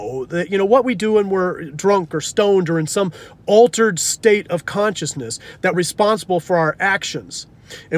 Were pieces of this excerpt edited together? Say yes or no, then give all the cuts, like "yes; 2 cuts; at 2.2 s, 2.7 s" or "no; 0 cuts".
yes; 1 cut; at 5.7 s